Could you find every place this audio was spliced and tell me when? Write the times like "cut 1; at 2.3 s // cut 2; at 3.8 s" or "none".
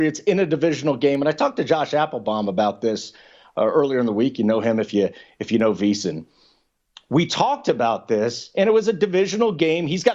none